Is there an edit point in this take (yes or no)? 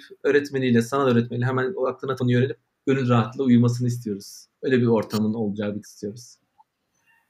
yes